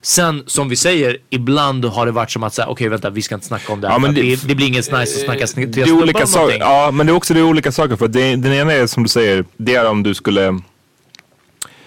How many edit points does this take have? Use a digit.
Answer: 1